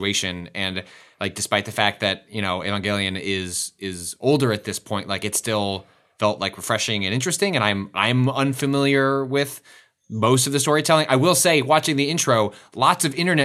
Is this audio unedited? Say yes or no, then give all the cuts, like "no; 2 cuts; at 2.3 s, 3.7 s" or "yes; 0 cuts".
yes; 0 cuts